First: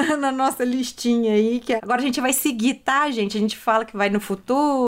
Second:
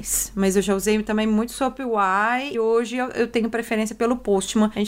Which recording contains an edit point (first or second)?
second